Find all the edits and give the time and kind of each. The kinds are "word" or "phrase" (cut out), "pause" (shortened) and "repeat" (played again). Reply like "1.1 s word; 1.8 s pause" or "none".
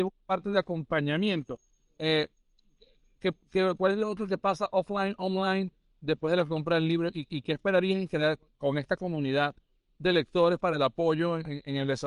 none